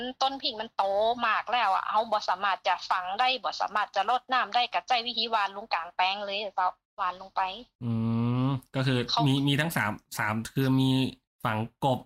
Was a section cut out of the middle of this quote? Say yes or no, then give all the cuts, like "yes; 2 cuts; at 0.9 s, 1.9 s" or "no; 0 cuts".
no; 0 cuts